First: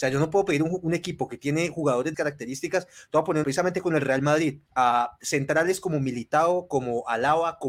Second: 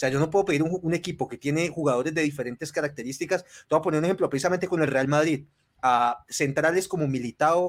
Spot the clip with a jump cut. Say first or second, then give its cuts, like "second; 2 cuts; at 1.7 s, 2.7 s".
first; 3 cuts; at 2.1 s, 3.4 s, 4.7 s